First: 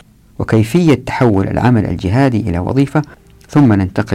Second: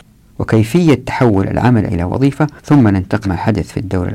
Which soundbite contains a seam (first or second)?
second